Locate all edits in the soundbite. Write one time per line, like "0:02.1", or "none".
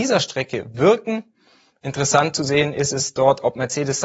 none